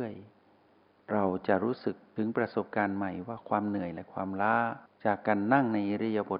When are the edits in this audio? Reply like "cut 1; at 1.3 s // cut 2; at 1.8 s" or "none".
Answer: cut 1; at 4.9 s